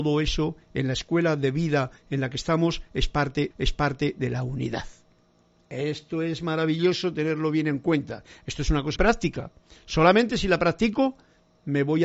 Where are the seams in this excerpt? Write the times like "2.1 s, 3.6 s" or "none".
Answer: 3.5 s, 9.0 s